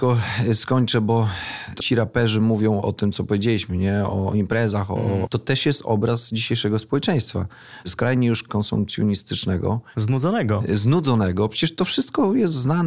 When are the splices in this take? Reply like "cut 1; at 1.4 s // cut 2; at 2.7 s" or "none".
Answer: cut 1; at 1.8 s // cut 2; at 5.3 s